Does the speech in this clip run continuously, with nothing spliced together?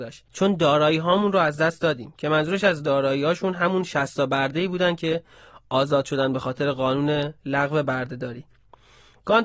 yes; 0 cuts

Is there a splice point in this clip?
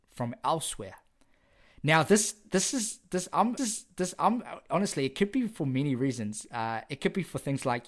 yes; 1 cut; at 3.6 s

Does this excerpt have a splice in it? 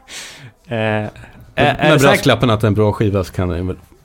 no; 0 cuts

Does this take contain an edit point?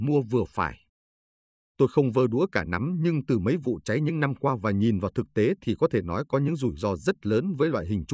no; 0 cuts

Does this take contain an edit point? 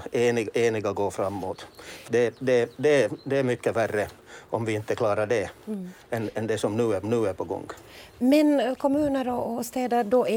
yes; 2 cuts; at 2.1 s, 7.0 s

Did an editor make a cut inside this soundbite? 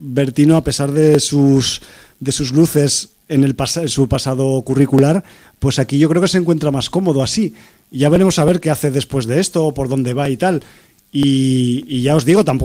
no; 0 cuts

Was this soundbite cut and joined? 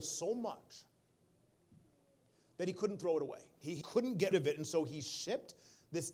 yes; 2 cuts; at 3.8 s, 4.3 s

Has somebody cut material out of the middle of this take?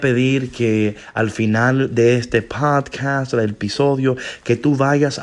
no; 0 cuts

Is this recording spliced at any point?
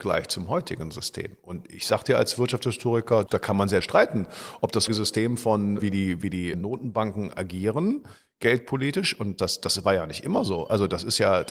yes; 6 cuts; at 3.3 s, 3.8 s, 4.9 s, 5.8 s, 6.5 s, 9.4 s

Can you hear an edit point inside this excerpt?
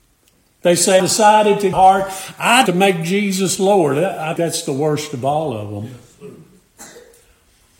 yes; 4 cuts; at 1.0 s, 1.7 s, 2.7 s, 4.4 s

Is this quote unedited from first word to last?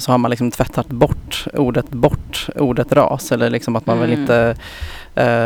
no; 1 cut; at 1.9 s

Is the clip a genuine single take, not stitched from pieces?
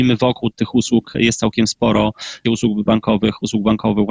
no; 2 cuts; at 2.4 s, 2.9 s

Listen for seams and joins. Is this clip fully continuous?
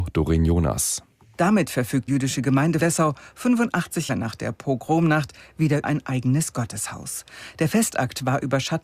no; 4 cuts; at 2.1 s, 2.8 s, 4.1 s, 5.8 s

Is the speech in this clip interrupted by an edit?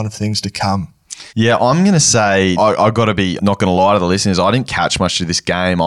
yes; 3 cuts; at 1.3 s, 2.6 s, 3.4 s

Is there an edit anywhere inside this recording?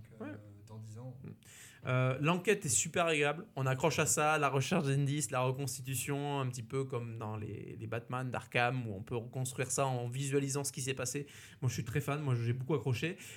no; 0 cuts

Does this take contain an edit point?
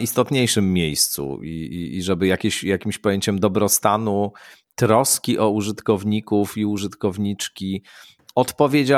no; 0 cuts

